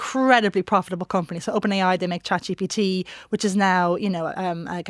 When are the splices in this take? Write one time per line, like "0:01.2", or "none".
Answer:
none